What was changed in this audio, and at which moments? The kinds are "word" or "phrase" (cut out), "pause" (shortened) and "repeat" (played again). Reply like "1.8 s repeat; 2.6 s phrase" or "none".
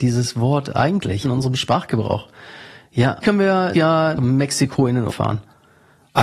1.2 s word; 3.2 s word; 3.7 s word; 4.2 s word; 5.1 s word